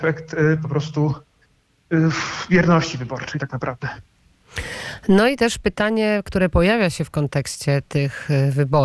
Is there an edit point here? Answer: no; 0 cuts

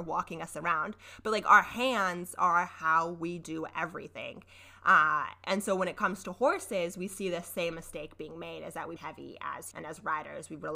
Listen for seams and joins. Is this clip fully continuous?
no; 2 cuts; at 9.0 s, 9.7 s

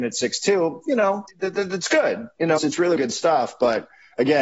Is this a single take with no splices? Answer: no; 3 cuts; at 1.3 s, 2.6 s, 3.0 s

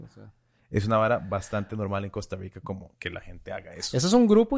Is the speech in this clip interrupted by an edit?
no; 0 cuts

